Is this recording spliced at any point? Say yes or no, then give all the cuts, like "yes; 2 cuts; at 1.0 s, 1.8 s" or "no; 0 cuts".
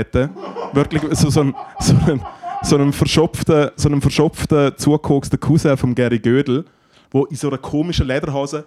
no; 0 cuts